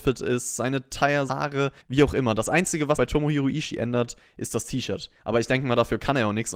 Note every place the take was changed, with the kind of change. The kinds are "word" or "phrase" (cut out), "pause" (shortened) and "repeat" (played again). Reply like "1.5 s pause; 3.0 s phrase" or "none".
1.3 s word; 1.8 s pause; 3.0 s word; 5.2 s pause